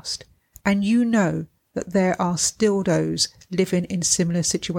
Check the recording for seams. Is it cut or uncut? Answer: uncut